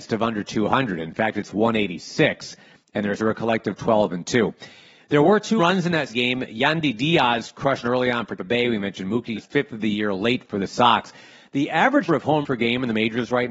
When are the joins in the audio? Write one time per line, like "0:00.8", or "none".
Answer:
0:03.2
0:05.6
0:06.1
0:07.8
0:08.4
0:09.4
0:12.1
0:12.4